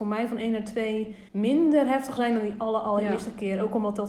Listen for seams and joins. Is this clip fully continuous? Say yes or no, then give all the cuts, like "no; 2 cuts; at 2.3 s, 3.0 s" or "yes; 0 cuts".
no; 2 cuts; at 1.3 s, 2.2 s